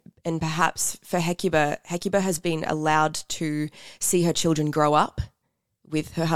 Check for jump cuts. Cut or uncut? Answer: uncut